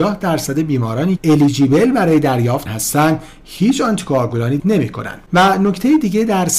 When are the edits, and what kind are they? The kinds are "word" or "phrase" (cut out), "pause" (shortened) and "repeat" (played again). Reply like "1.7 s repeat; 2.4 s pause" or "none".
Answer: 1.2 s word; 2.7 s word; 4.6 s word